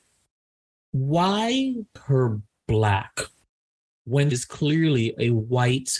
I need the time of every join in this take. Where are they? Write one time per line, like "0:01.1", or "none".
0:02.0
0:04.3